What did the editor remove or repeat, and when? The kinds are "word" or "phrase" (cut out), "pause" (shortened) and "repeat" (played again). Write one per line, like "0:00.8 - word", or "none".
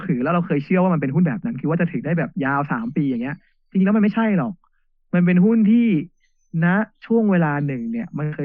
none

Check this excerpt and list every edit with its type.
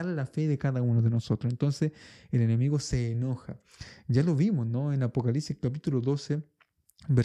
none

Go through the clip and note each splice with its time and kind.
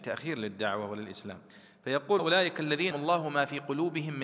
0:02.2 - word
0:02.9 - word

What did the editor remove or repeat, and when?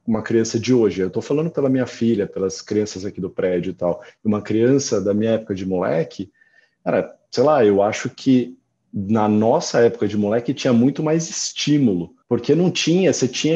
0:12.2 - pause

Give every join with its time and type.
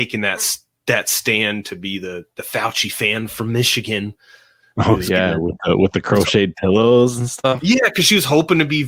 none

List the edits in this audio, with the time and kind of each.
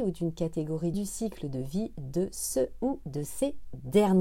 0:00.9 - phrase

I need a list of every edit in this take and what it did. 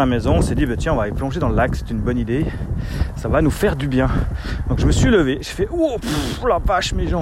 none

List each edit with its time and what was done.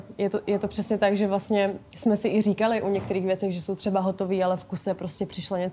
none

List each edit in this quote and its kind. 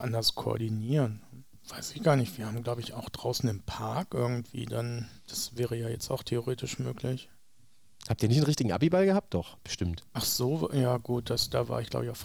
0:05.2 - pause

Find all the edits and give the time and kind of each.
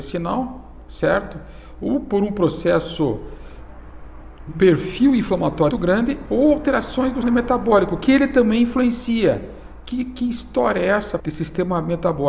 0:04.5 - word
0:05.7 - word
0:07.2 - word
0:11.2 - word

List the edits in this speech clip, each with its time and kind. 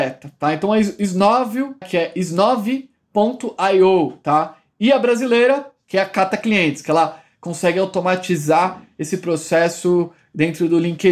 0:01.8 - word

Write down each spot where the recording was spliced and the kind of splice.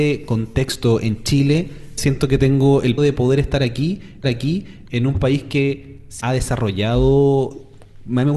0:02.0 - word
0:03.0 - word
0:04.2 - repeat
0:06.2 - word

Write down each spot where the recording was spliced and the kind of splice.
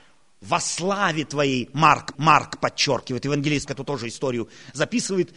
0:02.1 - repeat
0:03.7 - word

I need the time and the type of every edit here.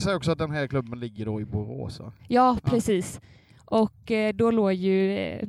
none

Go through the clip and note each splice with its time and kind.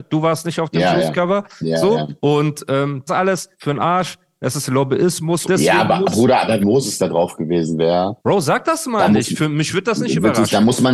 0:02.2 - pause
0:03.1 - phrase
0:03.5 - pause
0:05.5 - word
0:06.1 - word
0:06.6 - phrase
0:07.0 - word
0:08.2 - pause

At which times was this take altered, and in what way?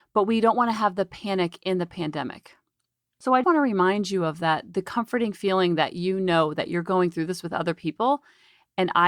0:03.4 - word

